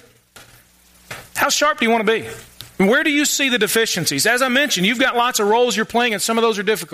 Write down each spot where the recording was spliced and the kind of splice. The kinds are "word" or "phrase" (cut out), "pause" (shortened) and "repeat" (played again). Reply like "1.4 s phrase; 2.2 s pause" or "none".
1.3 s pause